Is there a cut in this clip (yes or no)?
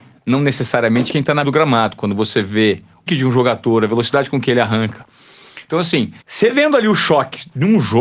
yes